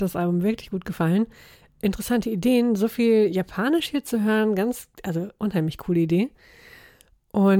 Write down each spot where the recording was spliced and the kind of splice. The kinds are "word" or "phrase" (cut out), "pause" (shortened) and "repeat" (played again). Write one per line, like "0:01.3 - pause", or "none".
0:04.9 - pause